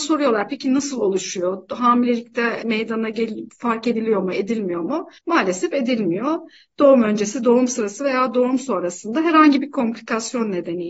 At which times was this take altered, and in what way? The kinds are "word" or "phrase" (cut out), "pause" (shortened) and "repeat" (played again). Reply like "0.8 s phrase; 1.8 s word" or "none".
5.2 s pause